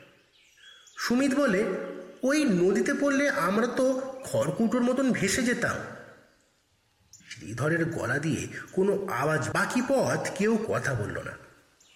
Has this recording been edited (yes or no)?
yes